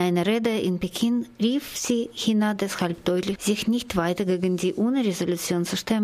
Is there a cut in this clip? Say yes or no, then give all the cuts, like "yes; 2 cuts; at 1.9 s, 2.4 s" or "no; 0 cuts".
yes; 1 cut; at 3.4 s